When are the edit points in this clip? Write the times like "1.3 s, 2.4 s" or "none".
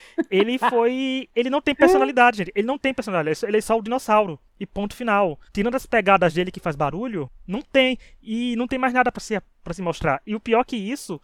4.5 s, 5.5 s